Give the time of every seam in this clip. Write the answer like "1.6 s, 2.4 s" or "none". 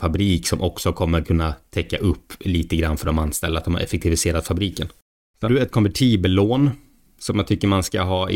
5.4 s